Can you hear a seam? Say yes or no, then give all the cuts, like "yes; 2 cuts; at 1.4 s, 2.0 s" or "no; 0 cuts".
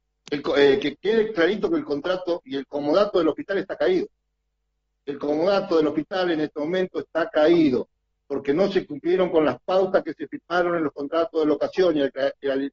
no; 0 cuts